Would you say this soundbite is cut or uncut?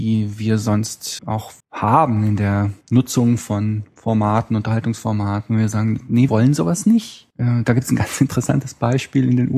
cut